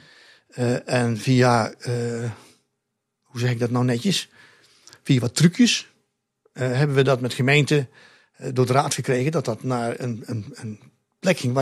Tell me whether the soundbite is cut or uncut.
uncut